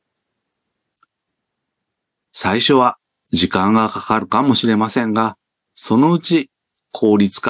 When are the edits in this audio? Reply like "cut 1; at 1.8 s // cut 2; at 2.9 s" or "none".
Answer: none